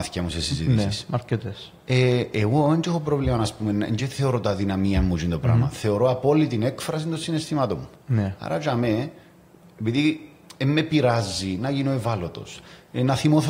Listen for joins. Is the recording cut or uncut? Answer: uncut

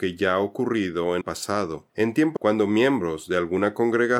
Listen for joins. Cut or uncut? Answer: cut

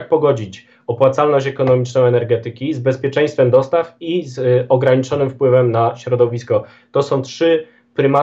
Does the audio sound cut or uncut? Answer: uncut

